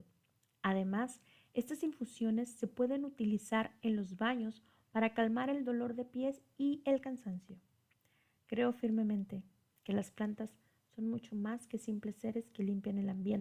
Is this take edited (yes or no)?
no